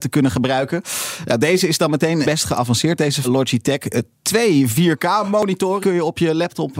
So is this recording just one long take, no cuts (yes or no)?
no